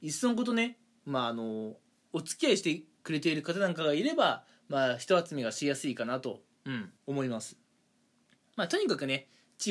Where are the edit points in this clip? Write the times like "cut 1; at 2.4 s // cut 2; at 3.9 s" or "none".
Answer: cut 1; at 7.0 s